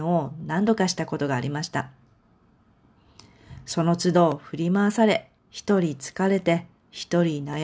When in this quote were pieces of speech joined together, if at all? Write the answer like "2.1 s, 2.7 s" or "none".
5.4 s